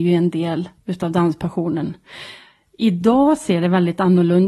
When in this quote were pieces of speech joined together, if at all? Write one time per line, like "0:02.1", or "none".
none